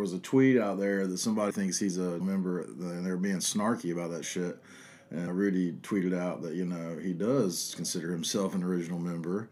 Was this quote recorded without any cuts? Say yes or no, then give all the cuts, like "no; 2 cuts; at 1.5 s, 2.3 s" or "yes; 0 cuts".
no; 4 cuts; at 1.5 s, 2.2 s, 2.6 s, 5.3 s